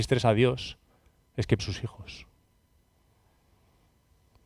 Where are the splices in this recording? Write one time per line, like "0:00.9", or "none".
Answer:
0:01.6